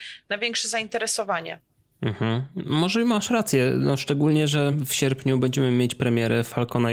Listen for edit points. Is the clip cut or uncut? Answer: uncut